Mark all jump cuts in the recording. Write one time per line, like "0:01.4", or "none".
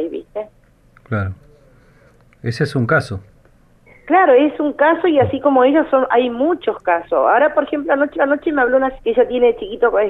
0:08.2
0:09.0